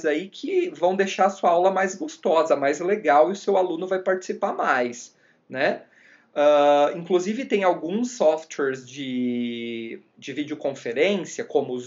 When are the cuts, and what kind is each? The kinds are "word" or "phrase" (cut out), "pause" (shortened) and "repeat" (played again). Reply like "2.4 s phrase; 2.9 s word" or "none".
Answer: none